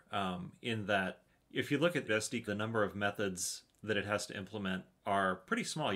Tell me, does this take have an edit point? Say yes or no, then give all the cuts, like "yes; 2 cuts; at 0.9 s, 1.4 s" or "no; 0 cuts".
yes; 3 cuts; at 1.3 s, 2.1 s, 2.5 s